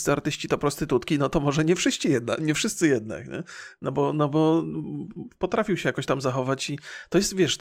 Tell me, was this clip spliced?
no; 0 cuts

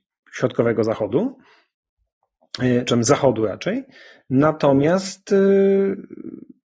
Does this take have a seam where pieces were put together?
no; 0 cuts

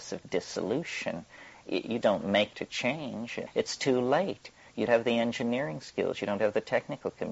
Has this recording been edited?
yes; 4 cuts; at 2.0 s, 2.5 s, 3.5 s, 4.9 s

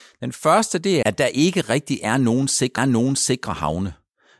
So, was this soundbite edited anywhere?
yes; 2 cuts; at 1.0 s, 2.8 s

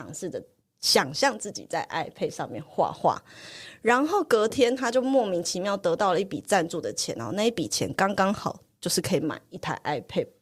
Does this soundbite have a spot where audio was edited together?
no; 0 cuts

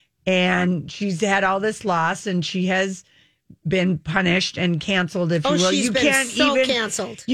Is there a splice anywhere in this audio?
no; 0 cuts

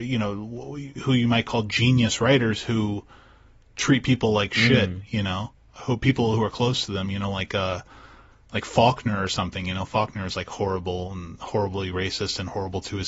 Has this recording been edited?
no; 0 cuts

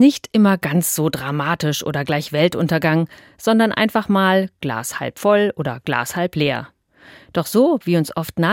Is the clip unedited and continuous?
yes; 0 cuts

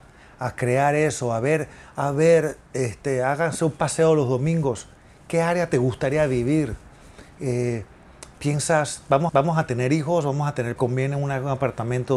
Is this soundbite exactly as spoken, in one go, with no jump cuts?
no; 3 cuts; at 8.3 s, 9.3 s, 10.8 s

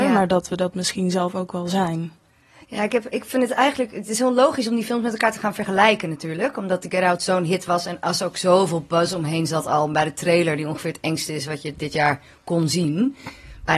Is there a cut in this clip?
no; 0 cuts

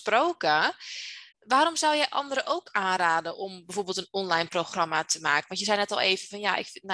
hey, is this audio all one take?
no; 1 cut; at 1.3 s

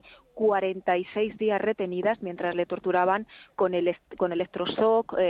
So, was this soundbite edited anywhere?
no; 0 cuts

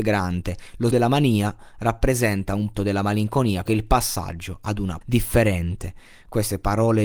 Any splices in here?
yes; 4 cuts; at 0.9 s, 2.7 s, 3.7 s, 5.0 s

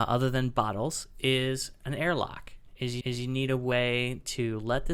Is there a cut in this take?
yes; 1 cut; at 3.0 s

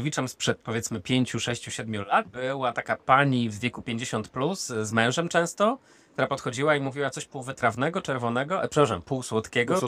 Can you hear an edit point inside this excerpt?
no; 0 cuts

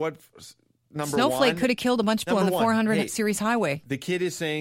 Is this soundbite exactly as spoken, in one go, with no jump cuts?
no; 1 cut; at 2.3 s

